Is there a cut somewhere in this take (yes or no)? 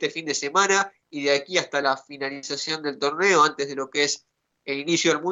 no